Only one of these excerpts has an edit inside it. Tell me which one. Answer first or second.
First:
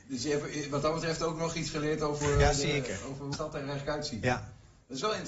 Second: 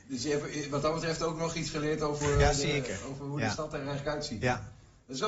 first